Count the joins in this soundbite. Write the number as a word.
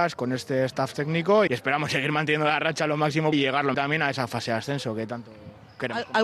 three